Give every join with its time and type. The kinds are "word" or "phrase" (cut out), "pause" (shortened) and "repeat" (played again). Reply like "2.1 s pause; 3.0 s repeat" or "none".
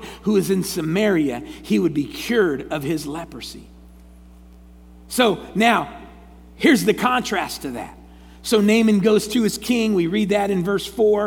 none